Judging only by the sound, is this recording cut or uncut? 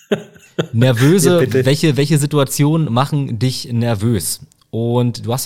uncut